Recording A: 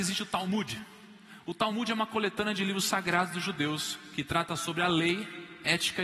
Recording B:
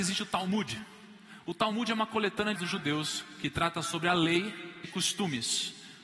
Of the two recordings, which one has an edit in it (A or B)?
B